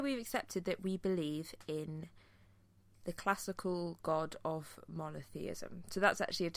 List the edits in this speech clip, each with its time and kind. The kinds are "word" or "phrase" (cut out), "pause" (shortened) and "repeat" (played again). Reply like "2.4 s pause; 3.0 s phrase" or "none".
none